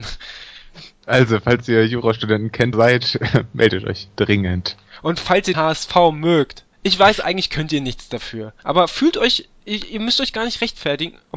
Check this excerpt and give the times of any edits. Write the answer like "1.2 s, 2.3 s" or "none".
2.7 s, 5.5 s, 6.7 s, 8.6 s